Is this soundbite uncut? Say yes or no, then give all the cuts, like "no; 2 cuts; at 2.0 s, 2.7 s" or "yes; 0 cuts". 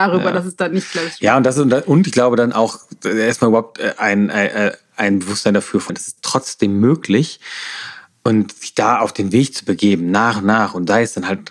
no; 1 cut; at 5.9 s